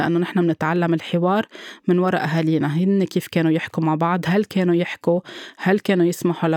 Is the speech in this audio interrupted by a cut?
no; 0 cuts

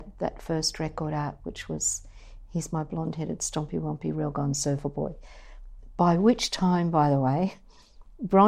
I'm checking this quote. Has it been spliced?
no; 0 cuts

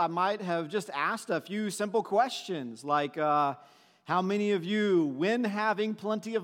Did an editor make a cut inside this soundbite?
no; 0 cuts

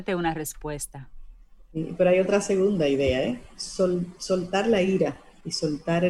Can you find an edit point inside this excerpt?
no; 0 cuts

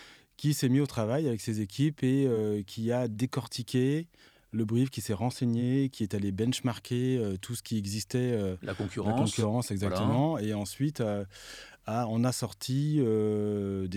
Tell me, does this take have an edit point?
no; 0 cuts

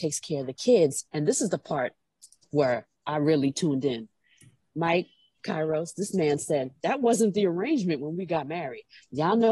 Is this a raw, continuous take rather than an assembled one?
yes; 0 cuts

